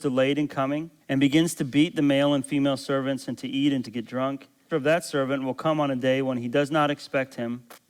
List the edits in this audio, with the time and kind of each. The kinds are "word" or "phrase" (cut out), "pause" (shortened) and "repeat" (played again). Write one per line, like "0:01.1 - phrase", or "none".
0:01.0 - pause
0:03.8 - phrase
0:04.7 - phrase

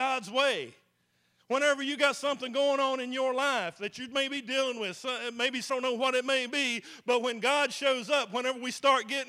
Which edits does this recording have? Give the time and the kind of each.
0:05.7 - word

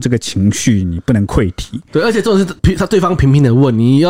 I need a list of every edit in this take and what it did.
0:02.6 - pause

